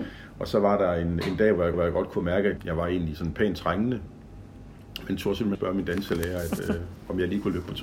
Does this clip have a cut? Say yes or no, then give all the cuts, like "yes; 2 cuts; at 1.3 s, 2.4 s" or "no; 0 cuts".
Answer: yes; 3 cuts; at 1.7 s, 2.6 s, 5.5 s